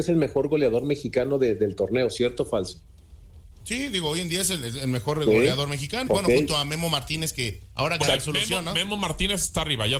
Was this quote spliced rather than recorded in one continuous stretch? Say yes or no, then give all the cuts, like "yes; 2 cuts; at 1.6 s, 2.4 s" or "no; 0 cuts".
yes; 3 cuts; at 6.1 s, 7.7 s, 8.0 s